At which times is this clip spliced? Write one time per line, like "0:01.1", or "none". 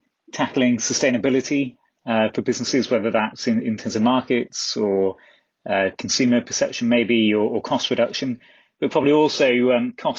none